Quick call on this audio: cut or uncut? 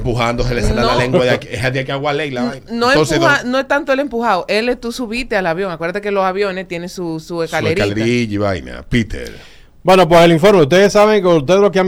uncut